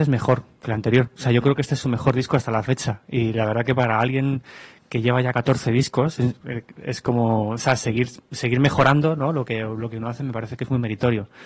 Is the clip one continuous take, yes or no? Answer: yes